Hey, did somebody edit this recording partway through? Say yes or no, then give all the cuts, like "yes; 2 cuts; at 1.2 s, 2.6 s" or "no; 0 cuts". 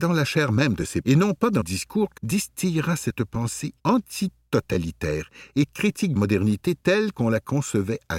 yes; 5 cuts; at 1.0 s, 1.6 s, 2.2 s, 3.8 s, 6.2 s